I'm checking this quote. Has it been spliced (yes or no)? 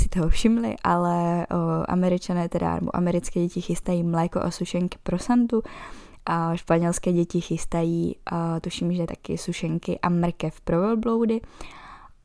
no